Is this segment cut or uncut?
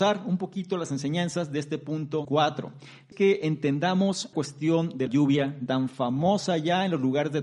cut